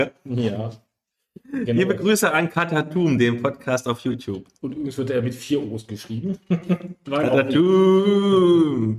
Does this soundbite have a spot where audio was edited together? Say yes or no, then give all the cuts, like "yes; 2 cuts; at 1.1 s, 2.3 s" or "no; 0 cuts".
no; 0 cuts